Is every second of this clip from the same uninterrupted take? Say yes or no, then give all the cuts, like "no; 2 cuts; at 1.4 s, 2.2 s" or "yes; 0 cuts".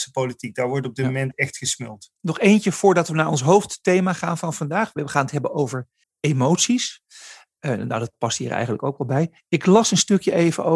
no; 2 cuts; at 2.2 s, 6.0 s